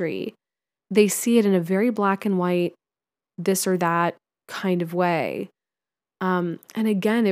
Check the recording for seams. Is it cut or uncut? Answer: uncut